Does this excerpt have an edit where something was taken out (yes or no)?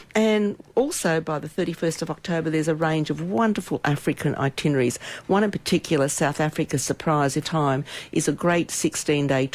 yes